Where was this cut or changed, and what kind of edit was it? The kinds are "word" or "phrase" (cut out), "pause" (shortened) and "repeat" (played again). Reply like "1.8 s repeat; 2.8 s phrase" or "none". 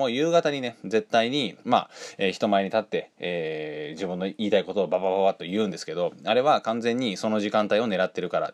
1.6 s pause